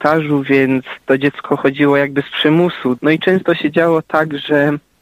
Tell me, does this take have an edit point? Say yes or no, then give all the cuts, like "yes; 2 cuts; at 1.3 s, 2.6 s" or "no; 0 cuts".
no; 0 cuts